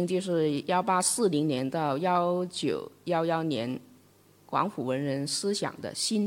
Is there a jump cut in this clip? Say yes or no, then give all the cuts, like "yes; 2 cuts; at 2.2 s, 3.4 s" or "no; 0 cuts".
no; 0 cuts